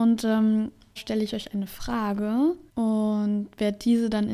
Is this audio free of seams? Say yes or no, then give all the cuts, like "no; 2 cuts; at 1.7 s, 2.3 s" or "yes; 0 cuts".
no; 2 cuts; at 1.0 s, 2.7 s